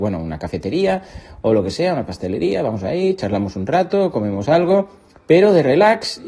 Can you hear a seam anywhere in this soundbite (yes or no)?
no